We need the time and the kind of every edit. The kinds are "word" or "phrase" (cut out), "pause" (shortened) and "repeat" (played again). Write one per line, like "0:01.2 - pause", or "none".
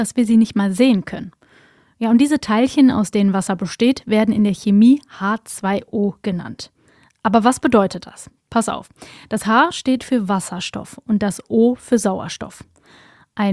none